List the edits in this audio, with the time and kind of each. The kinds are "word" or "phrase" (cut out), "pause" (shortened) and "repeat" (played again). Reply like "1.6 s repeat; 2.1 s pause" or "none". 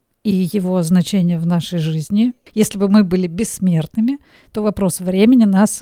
none